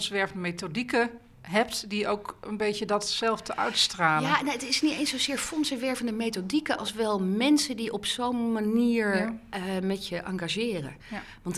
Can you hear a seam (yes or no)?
no